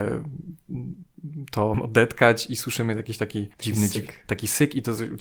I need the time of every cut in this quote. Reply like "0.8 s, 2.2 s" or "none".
1.7 s, 3.5 s